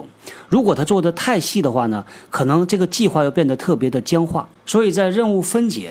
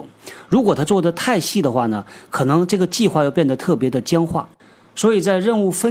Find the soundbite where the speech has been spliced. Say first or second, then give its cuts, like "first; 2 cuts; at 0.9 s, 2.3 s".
first; 1 cut; at 4.6 s